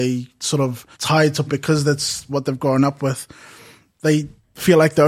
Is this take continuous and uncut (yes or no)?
no